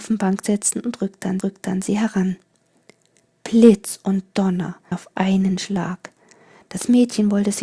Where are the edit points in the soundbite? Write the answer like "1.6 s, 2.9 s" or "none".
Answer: 1.4 s, 4.9 s